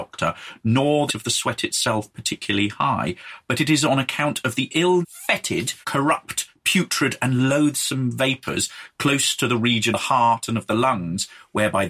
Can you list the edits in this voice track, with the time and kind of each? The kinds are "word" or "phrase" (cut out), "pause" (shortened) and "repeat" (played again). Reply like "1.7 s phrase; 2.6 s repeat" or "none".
1.1 s word; 5.0 s word; 5.8 s pause; 9.9 s word